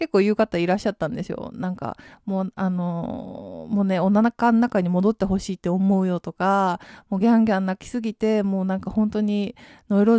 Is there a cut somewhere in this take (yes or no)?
no